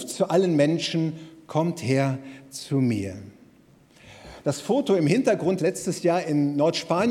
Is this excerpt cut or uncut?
cut